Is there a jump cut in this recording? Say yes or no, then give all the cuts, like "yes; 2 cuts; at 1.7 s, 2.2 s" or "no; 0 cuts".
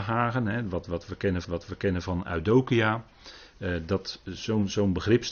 yes; 1 cut; at 1.4 s